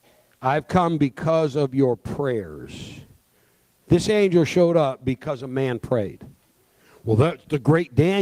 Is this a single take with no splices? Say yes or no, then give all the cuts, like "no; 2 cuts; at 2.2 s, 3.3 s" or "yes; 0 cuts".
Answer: yes; 0 cuts